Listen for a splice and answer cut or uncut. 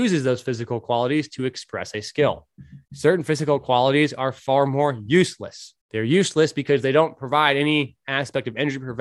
cut